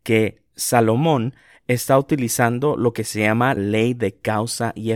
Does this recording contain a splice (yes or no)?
yes